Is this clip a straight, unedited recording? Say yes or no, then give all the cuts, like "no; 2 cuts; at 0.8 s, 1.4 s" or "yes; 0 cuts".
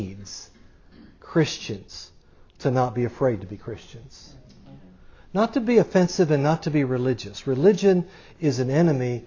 yes; 0 cuts